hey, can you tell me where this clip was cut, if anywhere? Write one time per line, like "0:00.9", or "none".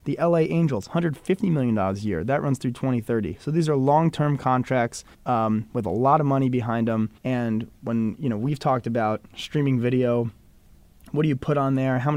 0:05.1
0:07.2